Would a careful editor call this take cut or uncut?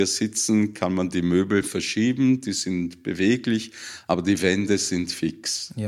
uncut